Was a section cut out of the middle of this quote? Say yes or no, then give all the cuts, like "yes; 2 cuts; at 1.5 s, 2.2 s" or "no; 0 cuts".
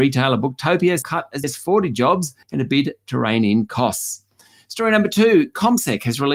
yes; 3 cuts; at 1.0 s, 1.4 s, 2.4 s